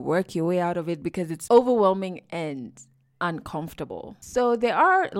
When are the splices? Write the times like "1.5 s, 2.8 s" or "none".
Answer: 1.5 s